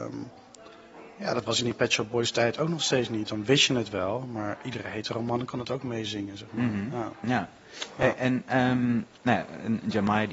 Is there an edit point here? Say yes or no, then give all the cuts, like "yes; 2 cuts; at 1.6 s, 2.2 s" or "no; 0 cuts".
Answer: no; 0 cuts